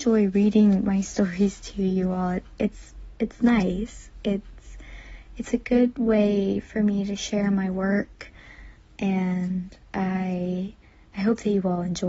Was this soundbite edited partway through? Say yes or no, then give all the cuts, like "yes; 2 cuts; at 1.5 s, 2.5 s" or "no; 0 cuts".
no; 0 cuts